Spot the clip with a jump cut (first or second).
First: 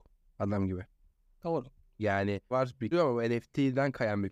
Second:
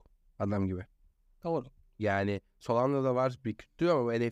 first